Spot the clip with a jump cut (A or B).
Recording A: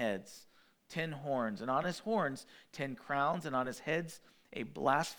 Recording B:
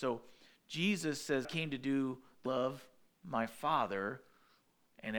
B